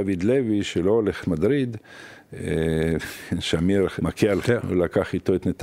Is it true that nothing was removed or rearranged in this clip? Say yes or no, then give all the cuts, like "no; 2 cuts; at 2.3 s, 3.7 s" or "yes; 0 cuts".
no; 3 cuts; at 1.2 s, 4.0 s, 4.4 s